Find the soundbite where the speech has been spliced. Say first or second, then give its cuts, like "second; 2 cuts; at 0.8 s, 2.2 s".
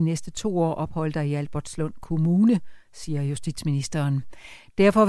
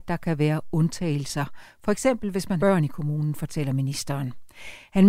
second; 1 cut; at 2.6 s